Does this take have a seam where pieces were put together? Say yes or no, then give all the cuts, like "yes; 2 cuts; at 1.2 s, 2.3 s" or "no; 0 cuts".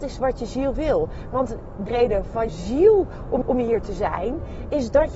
yes; 3 cuts; at 1.9 s, 2.5 s, 3.4 s